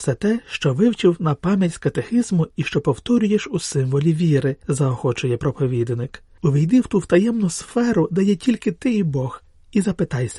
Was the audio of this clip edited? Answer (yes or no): no